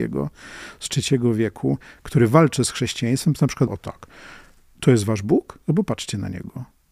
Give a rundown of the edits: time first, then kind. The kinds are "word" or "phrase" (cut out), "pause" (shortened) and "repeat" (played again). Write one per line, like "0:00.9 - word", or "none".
0:03.7 - word
0:05.6 - pause